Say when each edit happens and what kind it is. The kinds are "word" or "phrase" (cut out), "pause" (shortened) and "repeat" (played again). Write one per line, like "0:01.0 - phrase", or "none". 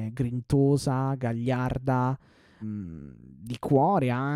0:02.6 - word